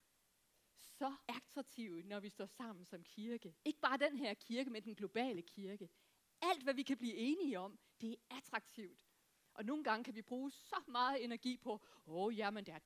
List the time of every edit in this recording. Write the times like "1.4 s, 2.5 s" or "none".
1.2 s, 3.6 s

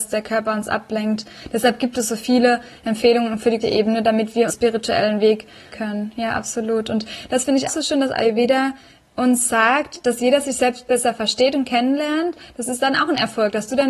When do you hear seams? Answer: 3.6 s, 4.5 s, 5.7 s, 7.7 s

